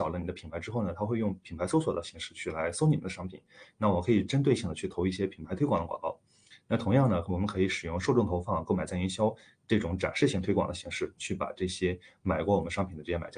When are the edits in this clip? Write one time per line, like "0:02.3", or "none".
none